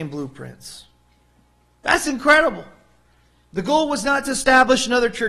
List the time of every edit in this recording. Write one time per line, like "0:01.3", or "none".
none